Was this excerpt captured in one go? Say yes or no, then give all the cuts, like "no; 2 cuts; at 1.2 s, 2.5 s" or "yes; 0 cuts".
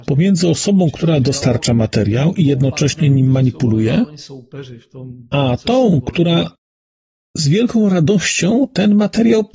yes; 0 cuts